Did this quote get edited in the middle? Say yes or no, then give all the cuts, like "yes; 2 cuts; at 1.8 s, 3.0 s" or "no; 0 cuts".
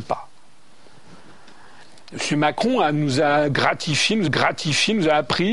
yes; 1 cut; at 4.3 s